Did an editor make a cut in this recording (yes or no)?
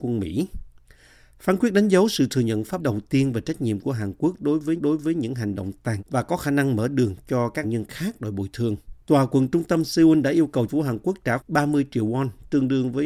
yes